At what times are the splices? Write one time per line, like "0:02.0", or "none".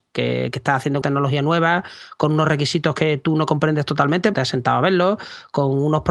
0:01.0
0:04.3